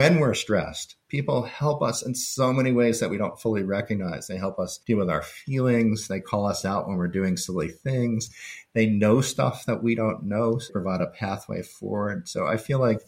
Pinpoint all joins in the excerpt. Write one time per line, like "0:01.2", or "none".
0:04.8
0:10.7